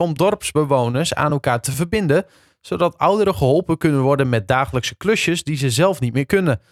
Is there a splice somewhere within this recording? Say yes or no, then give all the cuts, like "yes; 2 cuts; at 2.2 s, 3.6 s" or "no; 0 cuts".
no; 0 cuts